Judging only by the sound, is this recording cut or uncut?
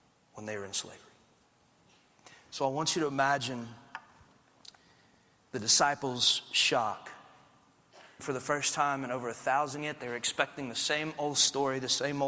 cut